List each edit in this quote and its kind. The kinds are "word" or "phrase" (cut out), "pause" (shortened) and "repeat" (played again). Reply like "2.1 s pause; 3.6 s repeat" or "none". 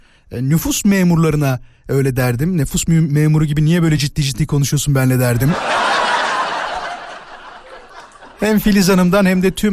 none